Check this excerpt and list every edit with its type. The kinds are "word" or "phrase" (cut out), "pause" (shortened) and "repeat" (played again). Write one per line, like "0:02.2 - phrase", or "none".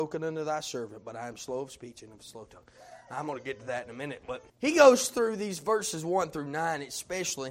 0:04.5 - pause